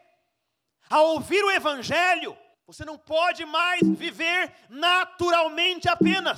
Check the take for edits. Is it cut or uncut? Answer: cut